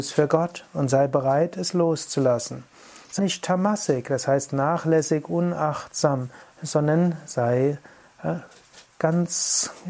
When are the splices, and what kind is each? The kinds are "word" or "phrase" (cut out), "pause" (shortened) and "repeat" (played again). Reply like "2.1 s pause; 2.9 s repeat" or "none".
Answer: 3.2 s word; 6.4 s pause; 8.9 s pause

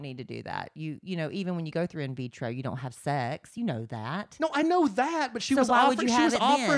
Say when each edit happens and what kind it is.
none

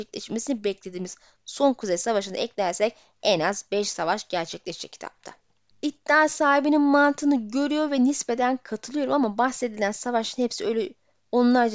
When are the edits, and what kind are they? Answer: none

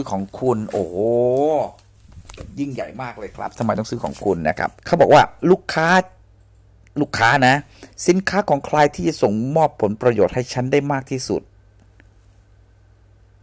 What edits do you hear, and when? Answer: 4.8 s pause

